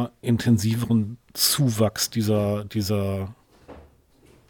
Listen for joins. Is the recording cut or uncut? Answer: cut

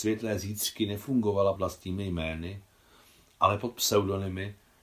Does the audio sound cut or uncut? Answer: cut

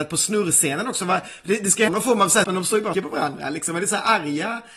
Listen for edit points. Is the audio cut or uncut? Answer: cut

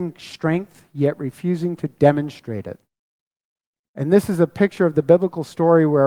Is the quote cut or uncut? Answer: uncut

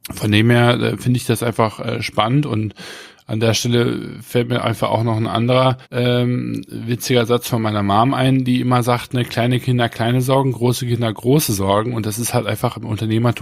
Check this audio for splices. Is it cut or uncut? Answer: cut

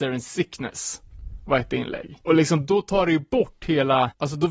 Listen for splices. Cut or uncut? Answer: uncut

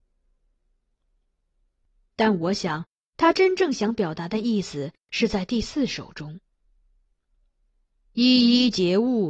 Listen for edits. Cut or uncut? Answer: uncut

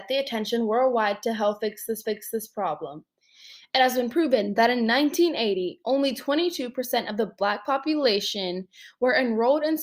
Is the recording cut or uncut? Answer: cut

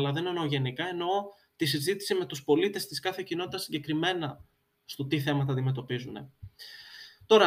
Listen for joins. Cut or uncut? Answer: uncut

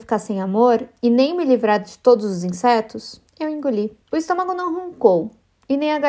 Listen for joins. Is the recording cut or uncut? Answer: cut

